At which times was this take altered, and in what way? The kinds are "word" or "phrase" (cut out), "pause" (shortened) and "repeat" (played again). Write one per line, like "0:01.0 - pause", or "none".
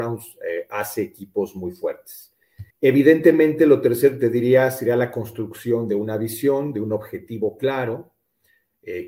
0:02.7 - pause